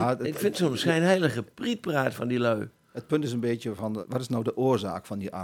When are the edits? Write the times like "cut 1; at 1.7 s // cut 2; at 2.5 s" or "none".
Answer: cut 1; at 4.0 s